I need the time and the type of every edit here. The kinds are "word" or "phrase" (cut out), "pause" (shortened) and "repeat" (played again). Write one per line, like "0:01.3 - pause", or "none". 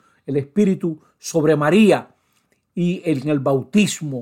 none